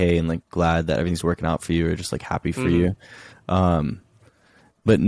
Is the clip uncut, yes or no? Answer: yes